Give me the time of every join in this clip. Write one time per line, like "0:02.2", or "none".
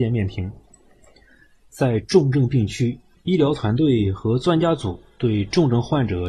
0:03.1